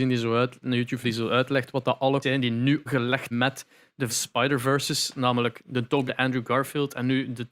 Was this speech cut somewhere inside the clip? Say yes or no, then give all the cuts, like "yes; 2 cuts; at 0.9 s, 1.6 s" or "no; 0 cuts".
yes; 6 cuts; at 1.0 s, 2.2 s, 2.9 s, 3.3 s, 4.1 s, 6.1 s